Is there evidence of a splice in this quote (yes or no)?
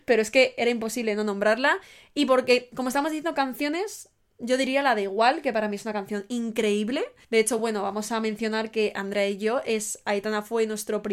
no